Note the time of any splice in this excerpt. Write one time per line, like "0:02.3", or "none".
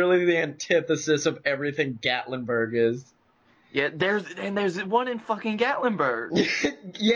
none

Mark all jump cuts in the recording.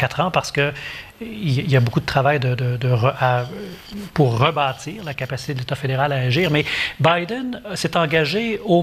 none

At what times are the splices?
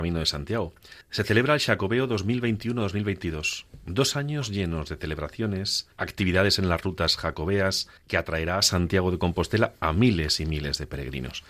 0:01.0
0:05.9
0:08.0

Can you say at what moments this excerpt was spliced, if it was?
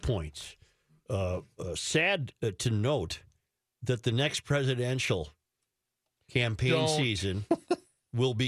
none

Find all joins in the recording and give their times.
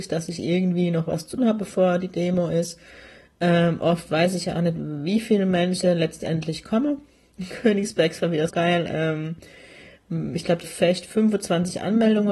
0:01.4
0:08.5
0:10.6

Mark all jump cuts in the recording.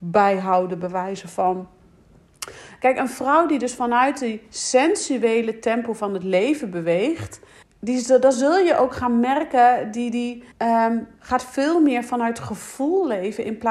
0:07.6
0:10.5

